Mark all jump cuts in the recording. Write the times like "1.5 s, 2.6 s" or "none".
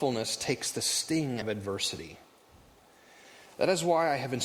1.4 s